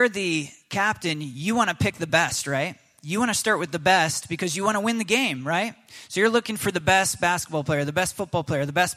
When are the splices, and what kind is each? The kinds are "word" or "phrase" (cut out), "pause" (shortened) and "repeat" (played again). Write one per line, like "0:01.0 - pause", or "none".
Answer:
none